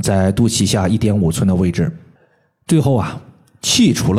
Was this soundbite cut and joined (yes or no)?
no